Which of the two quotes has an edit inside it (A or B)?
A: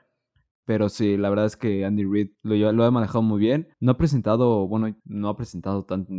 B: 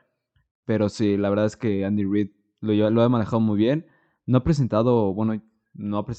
A